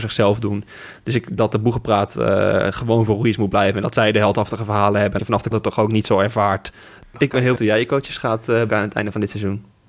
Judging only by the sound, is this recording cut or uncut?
cut